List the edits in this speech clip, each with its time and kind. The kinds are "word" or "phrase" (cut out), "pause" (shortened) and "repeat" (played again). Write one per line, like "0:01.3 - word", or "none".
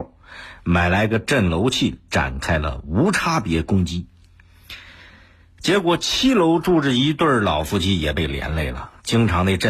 none